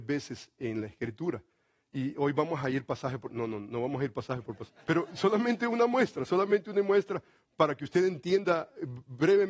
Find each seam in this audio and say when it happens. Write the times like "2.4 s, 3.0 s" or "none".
4.8 s